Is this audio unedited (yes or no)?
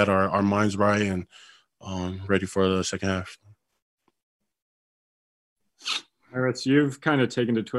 yes